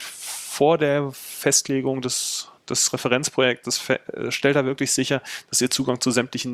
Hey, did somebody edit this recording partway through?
no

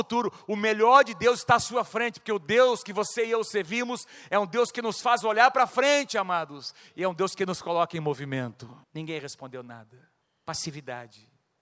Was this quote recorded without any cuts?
no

